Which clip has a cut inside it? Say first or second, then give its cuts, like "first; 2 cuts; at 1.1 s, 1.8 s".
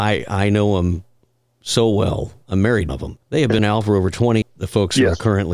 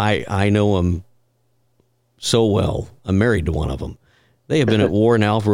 first; 5 cuts; at 1.2 s, 2.9 s, 3.2 s, 3.6 s, 4.4 s